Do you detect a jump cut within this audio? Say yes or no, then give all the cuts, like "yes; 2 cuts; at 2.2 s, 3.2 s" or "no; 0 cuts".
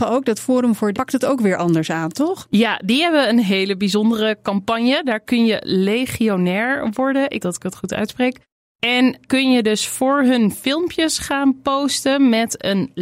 yes; 3 cuts; at 0.9 s, 7.4 s, 9.3 s